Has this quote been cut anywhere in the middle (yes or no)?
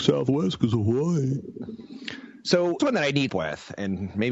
yes